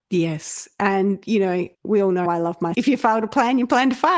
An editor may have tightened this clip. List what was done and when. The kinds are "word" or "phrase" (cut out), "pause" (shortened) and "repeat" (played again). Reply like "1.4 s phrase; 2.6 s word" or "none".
1.7 s pause; 2.3 s word; 2.7 s word